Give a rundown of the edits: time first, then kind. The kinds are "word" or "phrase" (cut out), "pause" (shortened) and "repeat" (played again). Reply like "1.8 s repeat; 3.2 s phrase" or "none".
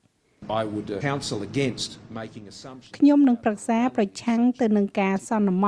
1.0 s word